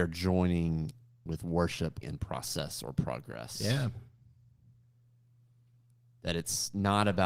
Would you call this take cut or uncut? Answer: cut